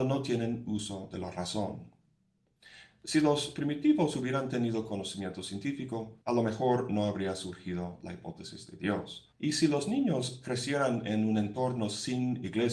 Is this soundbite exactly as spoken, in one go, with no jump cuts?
no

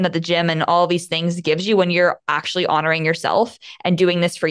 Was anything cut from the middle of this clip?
no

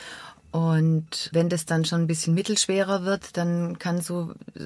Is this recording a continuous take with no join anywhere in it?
no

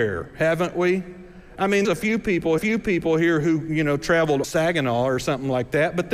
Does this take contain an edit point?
yes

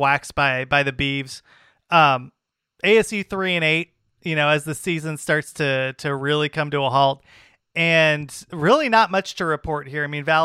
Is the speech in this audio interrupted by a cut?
no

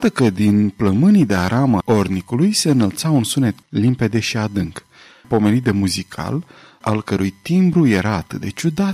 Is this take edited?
yes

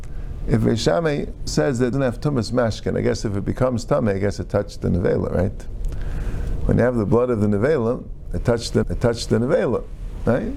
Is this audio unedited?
no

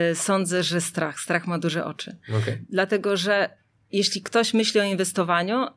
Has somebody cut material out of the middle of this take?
no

